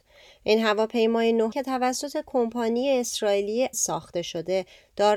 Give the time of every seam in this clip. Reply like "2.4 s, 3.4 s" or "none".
1.5 s, 3.7 s